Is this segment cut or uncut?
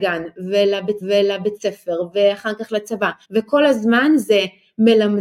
cut